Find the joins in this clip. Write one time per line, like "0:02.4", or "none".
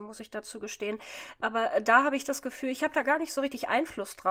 none